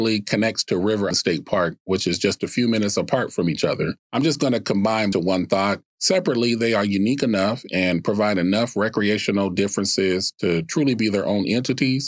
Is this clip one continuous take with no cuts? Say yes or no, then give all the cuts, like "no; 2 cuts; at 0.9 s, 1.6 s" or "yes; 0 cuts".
no; 4 cuts; at 1.1 s, 4.0 s, 5.1 s, 5.9 s